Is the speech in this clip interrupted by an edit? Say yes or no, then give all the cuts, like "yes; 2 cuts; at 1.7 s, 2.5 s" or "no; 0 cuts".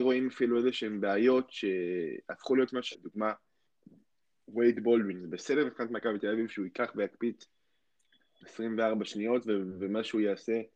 yes; 1 cut; at 2.9 s